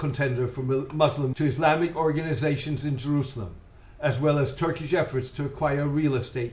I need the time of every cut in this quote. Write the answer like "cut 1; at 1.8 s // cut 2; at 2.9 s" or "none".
cut 1; at 1.3 s